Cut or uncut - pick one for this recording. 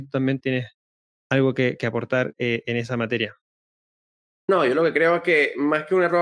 uncut